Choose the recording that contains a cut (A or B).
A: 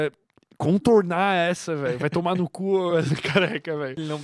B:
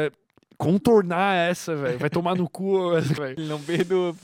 B